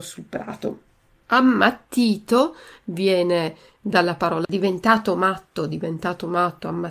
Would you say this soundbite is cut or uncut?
cut